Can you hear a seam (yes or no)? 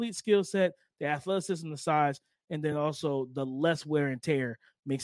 no